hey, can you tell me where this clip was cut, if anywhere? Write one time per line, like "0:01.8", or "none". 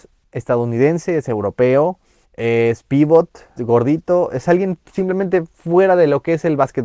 0:02.2
0:03.6